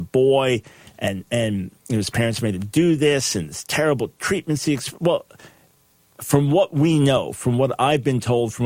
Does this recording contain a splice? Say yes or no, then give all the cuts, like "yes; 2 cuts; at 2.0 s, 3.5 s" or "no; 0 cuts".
no; 0 cuts